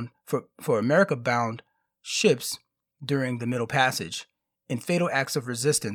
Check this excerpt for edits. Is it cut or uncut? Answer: uncut